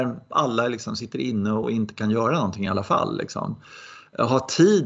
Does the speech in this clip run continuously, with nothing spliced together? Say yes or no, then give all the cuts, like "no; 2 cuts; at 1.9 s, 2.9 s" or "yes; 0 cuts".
yes; 0 cuts